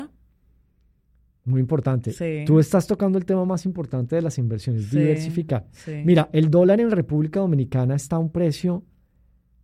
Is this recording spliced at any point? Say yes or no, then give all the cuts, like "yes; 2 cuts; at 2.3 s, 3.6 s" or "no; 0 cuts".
no; 0 cuts